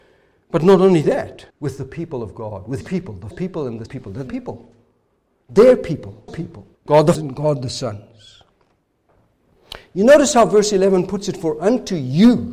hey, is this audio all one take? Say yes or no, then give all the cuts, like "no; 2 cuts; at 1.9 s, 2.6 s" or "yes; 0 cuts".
no; 8 cuts; at 1.5 s, 2.8 s, 3.3 s, 3.9 s, 4.3 s, 6.3 s, 6.7 s, 7.1 s